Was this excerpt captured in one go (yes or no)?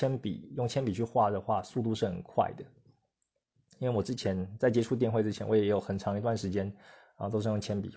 yes